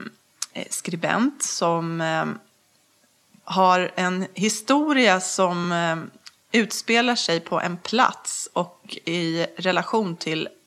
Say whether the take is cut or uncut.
uncut